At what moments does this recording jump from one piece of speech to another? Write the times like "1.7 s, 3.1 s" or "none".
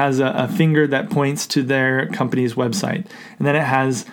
none